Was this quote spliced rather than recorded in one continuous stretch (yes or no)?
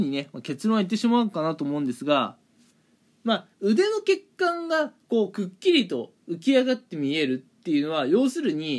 no